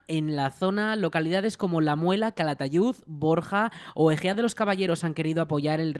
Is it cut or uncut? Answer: uncut